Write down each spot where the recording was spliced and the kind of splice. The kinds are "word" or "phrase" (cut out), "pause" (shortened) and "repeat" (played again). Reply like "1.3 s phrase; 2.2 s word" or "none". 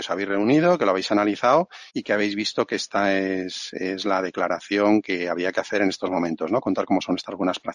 1.9 s pause

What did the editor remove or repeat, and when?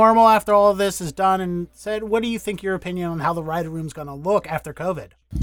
none

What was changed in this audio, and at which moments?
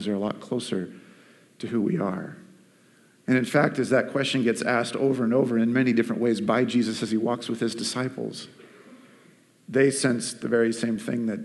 none

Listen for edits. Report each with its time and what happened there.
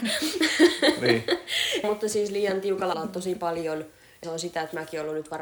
1.8 s word; 2.9 s word; 4.2 s word

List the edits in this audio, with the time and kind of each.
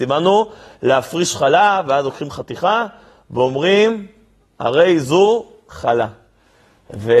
none

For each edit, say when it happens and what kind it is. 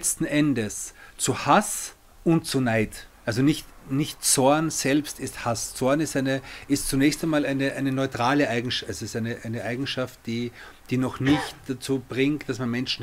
2.1 s pause; 3.1 s pause

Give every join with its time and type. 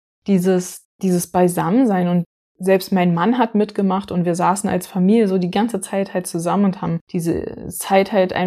0.9 s pause; 2.4 s pause; 7.0 s pause

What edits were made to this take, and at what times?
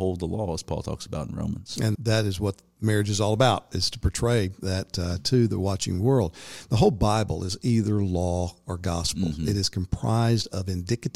1.9 s word

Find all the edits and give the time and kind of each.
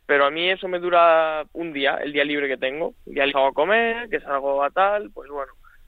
1.5 s word; 3.3 s phrase

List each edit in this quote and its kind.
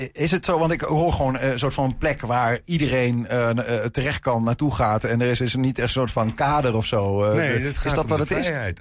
none

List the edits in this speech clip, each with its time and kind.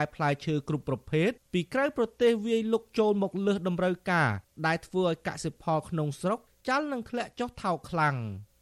none

